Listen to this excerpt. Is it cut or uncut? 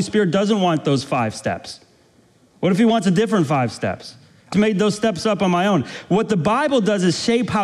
cut